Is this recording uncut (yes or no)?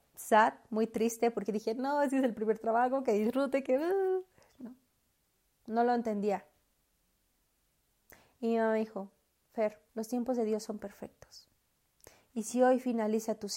no